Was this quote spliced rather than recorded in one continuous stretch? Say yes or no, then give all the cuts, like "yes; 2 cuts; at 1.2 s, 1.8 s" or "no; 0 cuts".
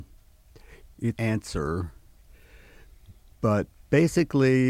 yes; 1 cut; at 1.2 s